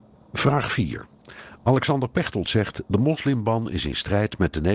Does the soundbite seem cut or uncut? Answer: uncut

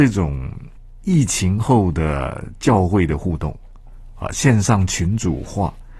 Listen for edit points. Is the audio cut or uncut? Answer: uncut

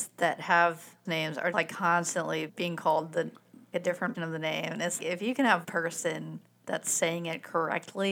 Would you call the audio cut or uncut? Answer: cut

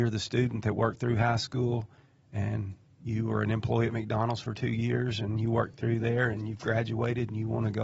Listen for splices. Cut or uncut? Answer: uncut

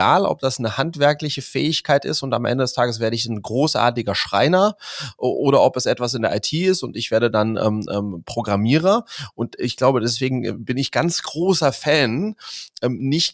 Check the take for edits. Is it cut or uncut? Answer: uncut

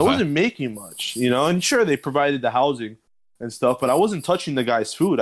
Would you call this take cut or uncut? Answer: uncut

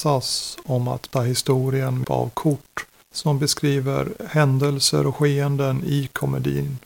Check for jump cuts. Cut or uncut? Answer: cut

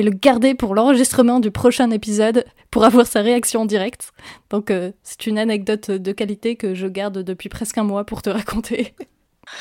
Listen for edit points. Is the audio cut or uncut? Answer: uncut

